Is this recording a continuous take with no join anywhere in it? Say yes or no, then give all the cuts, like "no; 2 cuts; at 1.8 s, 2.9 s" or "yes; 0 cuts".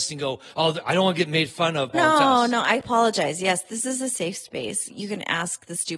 no; 1 cut; at 1.9 s